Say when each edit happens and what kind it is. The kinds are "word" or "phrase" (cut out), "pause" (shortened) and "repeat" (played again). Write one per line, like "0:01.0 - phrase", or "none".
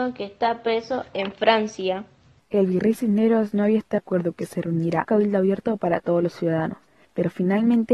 0:04.0 - word
0:05.0 - word